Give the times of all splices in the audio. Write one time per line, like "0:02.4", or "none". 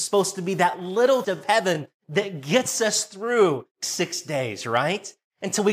0:01.2
0:03.8